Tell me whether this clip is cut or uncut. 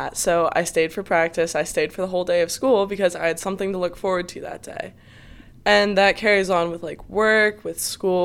uncut